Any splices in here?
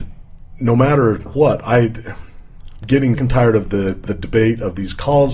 yes; 4 cuts; at 1.3 s, 2.8 s, 3.2 s, 4.1 s

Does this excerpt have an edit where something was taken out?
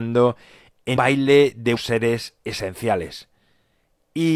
yes; 2 cuts; at 1.0 s, 1.8 s

